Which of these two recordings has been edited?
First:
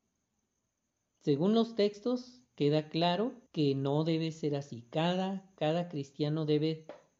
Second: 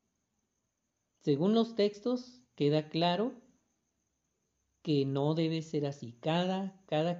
first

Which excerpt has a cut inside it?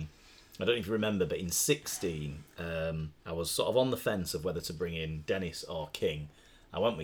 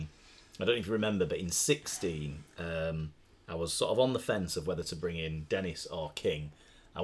first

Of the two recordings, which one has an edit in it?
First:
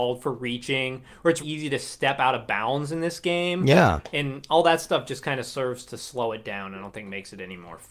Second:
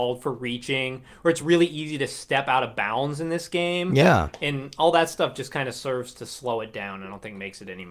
first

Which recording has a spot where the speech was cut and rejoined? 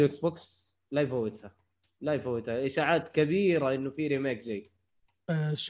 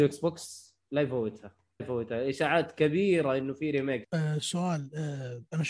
second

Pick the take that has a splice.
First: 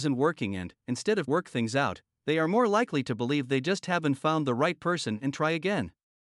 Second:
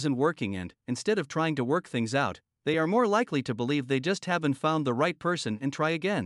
first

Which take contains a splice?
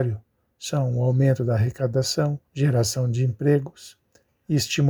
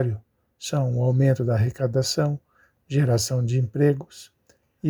first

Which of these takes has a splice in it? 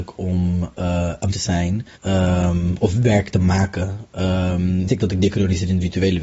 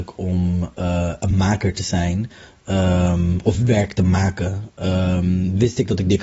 first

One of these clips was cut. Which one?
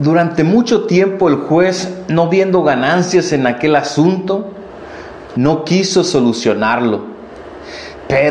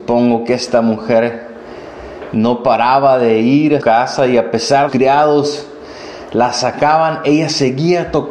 second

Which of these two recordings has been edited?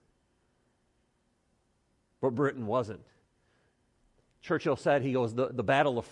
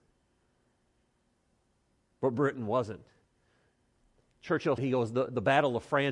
second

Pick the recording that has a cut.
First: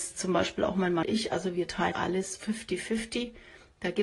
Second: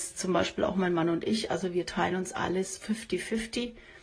first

